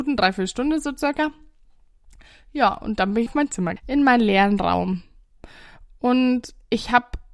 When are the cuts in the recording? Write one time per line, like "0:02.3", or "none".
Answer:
0:03.3
0:03.8